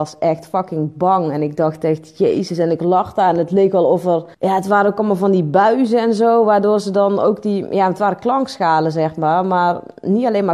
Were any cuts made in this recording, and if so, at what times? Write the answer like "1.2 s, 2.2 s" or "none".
4.3 s